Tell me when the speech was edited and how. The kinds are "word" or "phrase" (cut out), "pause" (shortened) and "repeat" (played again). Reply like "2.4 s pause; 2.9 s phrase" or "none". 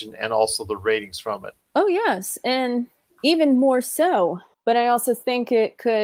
none